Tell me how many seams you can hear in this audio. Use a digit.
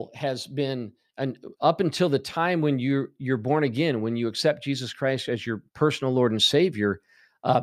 1